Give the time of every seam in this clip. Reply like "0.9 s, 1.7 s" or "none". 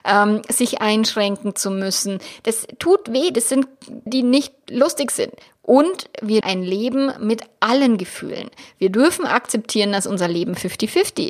4.1 s, 6.4 s